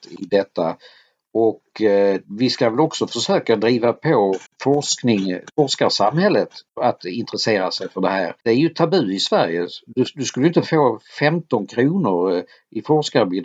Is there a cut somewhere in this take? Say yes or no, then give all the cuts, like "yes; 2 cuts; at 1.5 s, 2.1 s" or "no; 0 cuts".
yes; 3 cuts; at 2.2 s, 4.5 s, 8.4 s